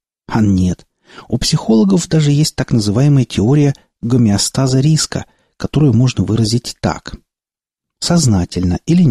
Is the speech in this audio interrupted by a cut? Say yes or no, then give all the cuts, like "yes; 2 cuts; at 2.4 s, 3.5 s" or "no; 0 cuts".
no; 0 cuts